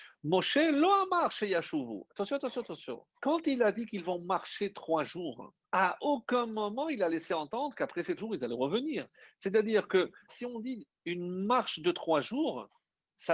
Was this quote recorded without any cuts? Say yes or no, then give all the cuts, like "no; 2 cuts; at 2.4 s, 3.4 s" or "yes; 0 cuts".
no; 4 cuts; at 3.1 s, 5.6 s, 8.2 s, 10.3 s